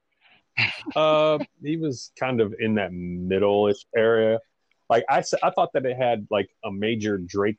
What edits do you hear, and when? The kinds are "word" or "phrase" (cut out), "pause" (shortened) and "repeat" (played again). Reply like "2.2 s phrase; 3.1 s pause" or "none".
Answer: none